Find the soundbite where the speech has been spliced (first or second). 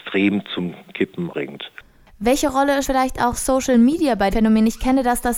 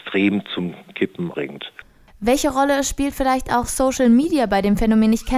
first